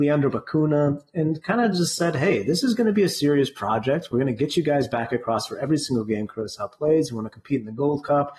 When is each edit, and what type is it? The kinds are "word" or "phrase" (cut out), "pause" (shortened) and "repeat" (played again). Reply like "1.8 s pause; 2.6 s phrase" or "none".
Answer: none